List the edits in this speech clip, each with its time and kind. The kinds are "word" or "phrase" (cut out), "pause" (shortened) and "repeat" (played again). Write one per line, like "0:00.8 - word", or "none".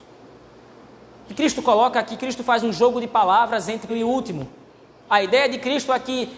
0:03.9 - word